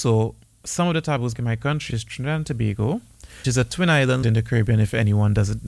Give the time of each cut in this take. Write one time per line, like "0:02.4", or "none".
0:01.3
0:01.9
0:03.4
0:04.2